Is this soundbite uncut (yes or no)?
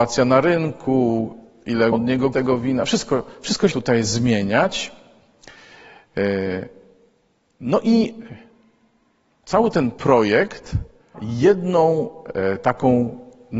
no